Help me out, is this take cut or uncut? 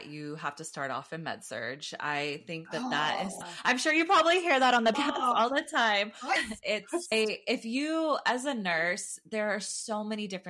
uncut